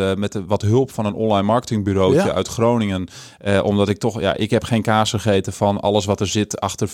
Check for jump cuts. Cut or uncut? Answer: uncut